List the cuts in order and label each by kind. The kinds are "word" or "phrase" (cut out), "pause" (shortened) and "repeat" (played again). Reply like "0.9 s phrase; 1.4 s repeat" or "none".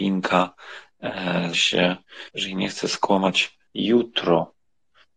1.5 s word; 2.3 s pause; 3.7 s pause